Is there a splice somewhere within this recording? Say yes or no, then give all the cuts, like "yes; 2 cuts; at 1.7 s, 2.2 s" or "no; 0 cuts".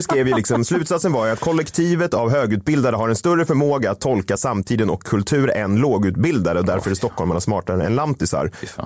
no; 0 cuts